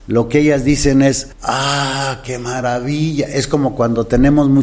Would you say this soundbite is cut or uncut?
uncut